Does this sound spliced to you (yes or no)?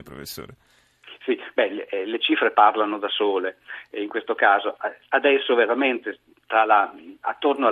no